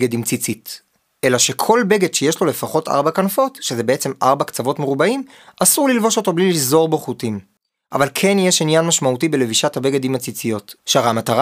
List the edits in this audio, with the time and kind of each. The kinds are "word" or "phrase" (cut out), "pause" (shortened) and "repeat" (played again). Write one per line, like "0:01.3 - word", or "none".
none